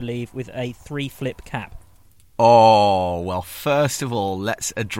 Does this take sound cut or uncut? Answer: uncut